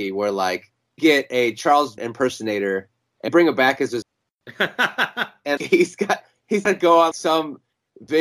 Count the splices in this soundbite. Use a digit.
7